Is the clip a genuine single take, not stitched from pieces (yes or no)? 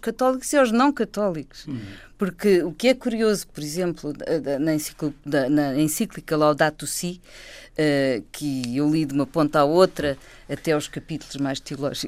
yes